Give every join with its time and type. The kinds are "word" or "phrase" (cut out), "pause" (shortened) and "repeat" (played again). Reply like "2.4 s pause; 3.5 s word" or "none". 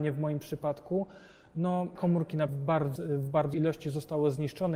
2.0 s word; 2.5 s word; 3.0 s word; 3.5 s word